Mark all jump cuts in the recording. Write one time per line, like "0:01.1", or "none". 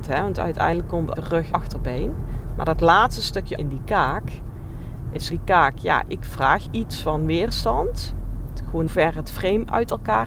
0:01.2
0:01.5
0:03.6
0:05.3
0:06.1
0:06.7
0:08.9